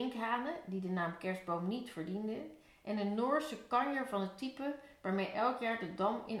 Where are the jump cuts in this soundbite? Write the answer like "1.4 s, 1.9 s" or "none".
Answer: none